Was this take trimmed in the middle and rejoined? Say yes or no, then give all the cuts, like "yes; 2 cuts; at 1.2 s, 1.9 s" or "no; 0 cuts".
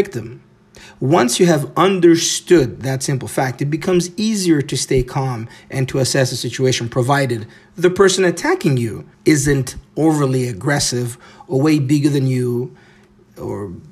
yes; 1 cut; at 9.1 s